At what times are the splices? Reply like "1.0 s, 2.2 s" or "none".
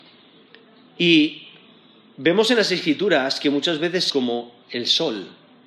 4.1 s